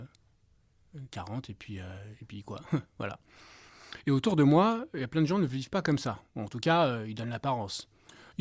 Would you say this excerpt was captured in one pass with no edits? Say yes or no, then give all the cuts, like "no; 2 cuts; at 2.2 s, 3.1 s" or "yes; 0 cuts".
no; 1 cut; at 2.9 s